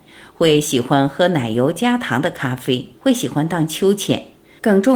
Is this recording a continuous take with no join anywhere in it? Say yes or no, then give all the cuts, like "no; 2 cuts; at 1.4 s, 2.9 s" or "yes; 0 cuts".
no; 1 cut; at 3.0 s